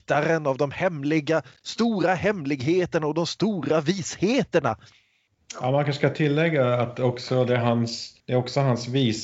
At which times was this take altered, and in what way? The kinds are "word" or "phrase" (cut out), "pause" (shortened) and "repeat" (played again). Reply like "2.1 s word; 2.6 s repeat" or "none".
8.2 s pause